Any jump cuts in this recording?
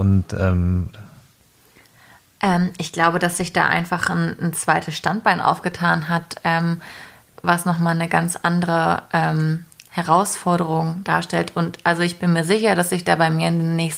no; 0 cuts

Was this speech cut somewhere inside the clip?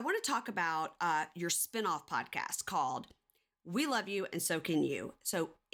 no; 0 cuts

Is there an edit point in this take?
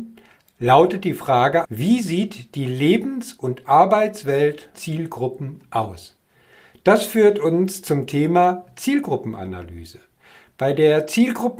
yes; 2 cuts; at 1.6 s, 4.7 s

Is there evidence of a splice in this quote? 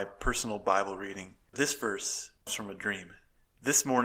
yes; 2 cuts; at 1.5 s, 2.5 s

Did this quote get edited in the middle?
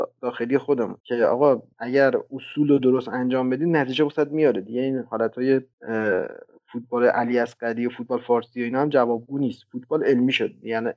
no; 0 cuts

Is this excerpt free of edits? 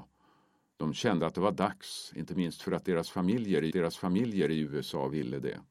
no; 1 cut; at 3.7 s

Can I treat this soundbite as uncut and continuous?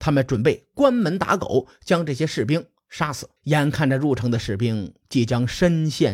no; 1 cut; at 3.4 s

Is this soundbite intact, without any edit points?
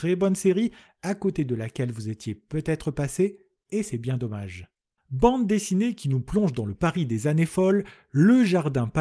yes; 0 cuts

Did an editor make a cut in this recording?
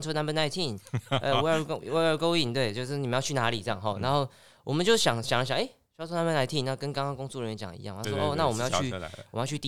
no; 0 cuts

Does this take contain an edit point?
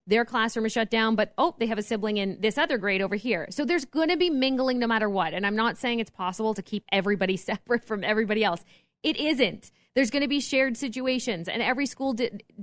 no; 0 cuts

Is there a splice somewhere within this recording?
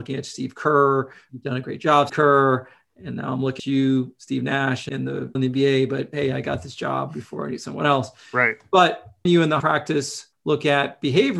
yes; 6 cuts; at 2.1 s, 3.6 s, 5.3 s, 9.3 s, 9.6 s, 10.3 s

